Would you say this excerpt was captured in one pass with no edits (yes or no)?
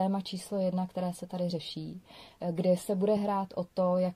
yes